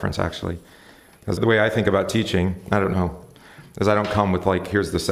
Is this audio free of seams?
no; 1 cut; at 1.4 s

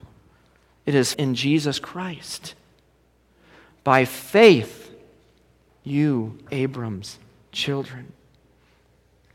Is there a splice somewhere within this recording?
yes; 2 cuts; at 1.1 s, 6.5 s

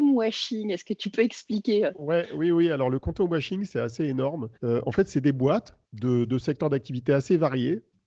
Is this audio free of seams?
no; 2 cuts; at 4.5 s, 5.8 s

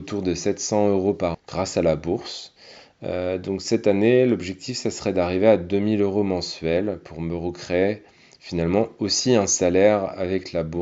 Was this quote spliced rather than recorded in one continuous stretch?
yes; 1 cut; at 1.3 s

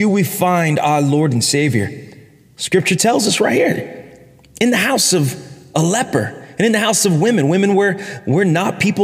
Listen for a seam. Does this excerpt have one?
no; 0 cuts

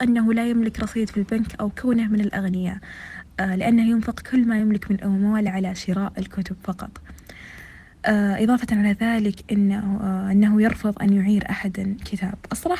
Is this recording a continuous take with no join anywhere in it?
yes; 0 cuts

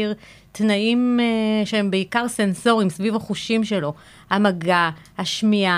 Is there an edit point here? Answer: no; 0 cuts

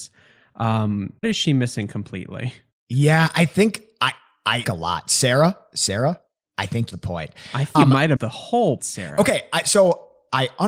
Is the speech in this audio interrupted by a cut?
yes; 6 cuts; at 1.2 s, 4.6 s, 6.9 s, 7.7 s, 8.2 s, 8.8 s

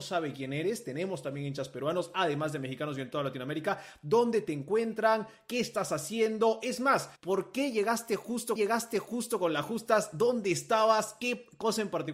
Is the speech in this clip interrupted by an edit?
yes; 2 cuts; at 7.2 s, 8.6 s

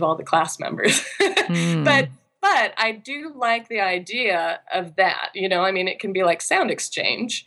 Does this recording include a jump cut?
no; 0 cuts

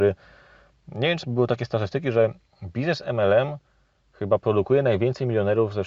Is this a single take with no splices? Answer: yes; 0 cuts

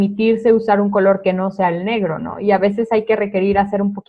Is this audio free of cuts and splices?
yes; 0 cuts

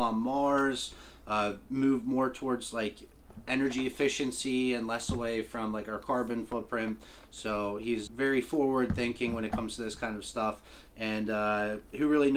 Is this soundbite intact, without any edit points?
no; 1 cut; at 8.1 s

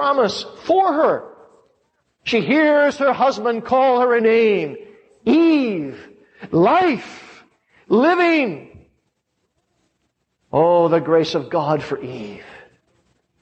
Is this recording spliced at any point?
yes; 1 cut; at 4.2 s

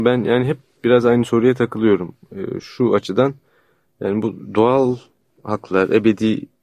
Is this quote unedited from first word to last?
yes; 0 cuts

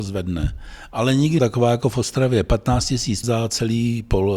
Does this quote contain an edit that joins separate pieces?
yes; 2 cuts; at 1.4 s, 3.2 s

